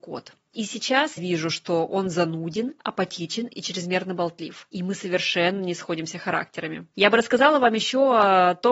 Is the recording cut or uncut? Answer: cut